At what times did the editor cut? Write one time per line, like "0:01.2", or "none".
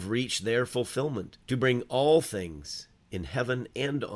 0:01.4